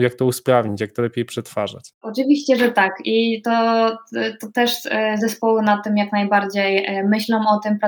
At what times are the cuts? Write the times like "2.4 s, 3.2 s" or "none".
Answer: 2.0 s